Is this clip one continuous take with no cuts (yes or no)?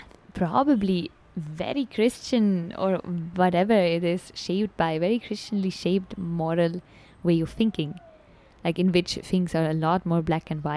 yes